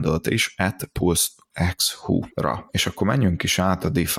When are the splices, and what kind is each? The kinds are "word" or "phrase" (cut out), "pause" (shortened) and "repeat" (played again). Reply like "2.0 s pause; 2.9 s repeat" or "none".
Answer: none